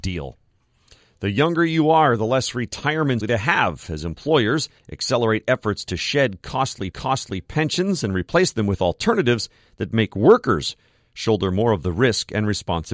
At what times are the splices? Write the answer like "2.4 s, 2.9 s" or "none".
3.2 s, 4.8 s, 6.9 s